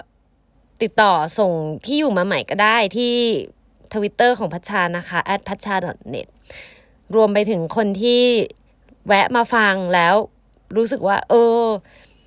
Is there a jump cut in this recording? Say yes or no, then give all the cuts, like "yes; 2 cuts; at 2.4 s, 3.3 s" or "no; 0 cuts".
no; 0 cuts